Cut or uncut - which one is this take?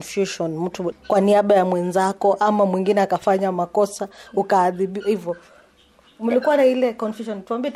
cut